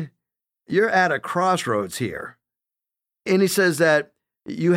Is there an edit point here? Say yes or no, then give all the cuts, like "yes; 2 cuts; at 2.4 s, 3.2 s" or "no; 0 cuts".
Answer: no; 0 cuts